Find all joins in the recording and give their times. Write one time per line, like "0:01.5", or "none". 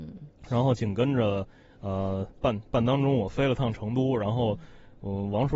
none